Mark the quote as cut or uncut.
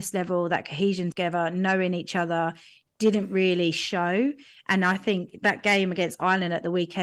cut